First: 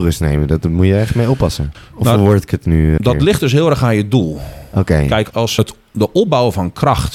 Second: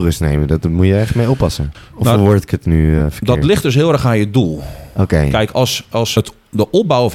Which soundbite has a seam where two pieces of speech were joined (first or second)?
first